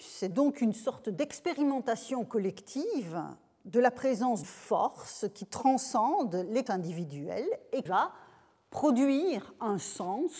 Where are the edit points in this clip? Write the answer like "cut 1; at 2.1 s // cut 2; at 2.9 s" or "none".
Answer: cut 1; at 4.4 s // cut 2; at 6.7 s // cut 3; at 7.9 s